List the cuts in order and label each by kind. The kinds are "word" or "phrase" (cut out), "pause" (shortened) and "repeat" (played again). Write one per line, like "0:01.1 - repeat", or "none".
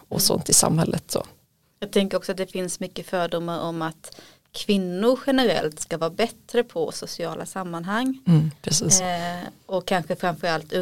none

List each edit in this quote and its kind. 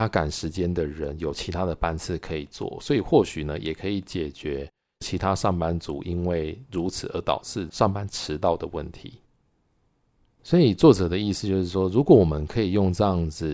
none

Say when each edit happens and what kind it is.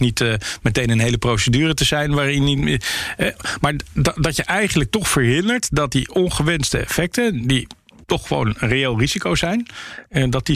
none

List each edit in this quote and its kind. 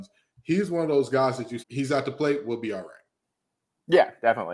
0:01.6 - word

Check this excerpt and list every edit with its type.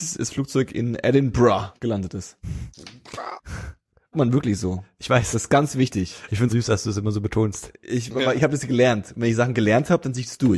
0:01.8 - pause
0:04.1 - phrase
0:06.5 - word

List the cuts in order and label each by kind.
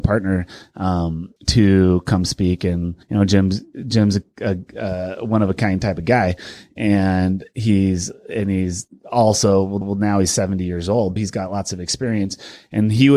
0:01.4 - pause
0:03.0 - pause
0:09.8 - repeat
0:11.2 - word

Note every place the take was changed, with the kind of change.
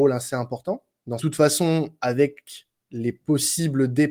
0:01.2 - phrase

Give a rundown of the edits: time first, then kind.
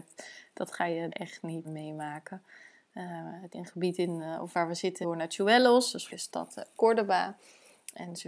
0:01.1 - word
0:01.6 - word
0:03.5 - word
0:05.0 - word
0:06.1 - word

